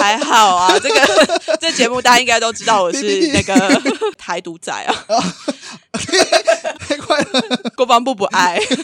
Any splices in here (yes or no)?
yes